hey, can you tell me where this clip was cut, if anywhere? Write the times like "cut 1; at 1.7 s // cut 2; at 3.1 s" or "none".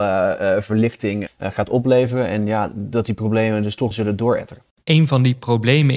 cut 1; at 1.3 s // cut 2; at 3.9 s